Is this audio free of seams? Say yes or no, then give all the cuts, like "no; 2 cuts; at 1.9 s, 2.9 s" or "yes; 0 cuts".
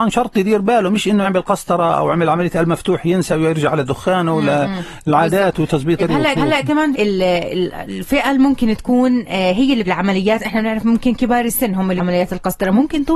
no; 6 cuts; at 1.2 s, 6.0 s, 6.3 s, 6.9 s, 9.8 s, 12.0 s